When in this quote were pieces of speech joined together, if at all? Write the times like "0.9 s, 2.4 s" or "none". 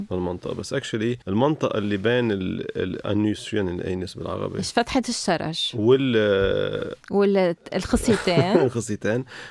1.2 s, 7.0 s